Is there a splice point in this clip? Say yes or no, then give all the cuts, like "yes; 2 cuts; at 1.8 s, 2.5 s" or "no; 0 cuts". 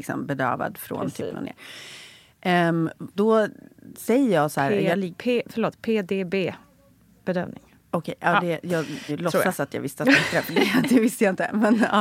yes; 3 cuts; at 1.3 s, 3.2 s, 9.1 s